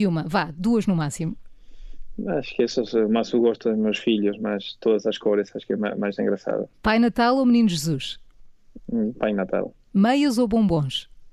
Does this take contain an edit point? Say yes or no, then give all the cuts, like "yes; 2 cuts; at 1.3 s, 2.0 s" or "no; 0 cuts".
yes; 1 cut; at 6.7 s